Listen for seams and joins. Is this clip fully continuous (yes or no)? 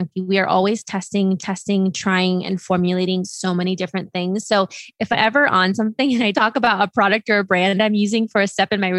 no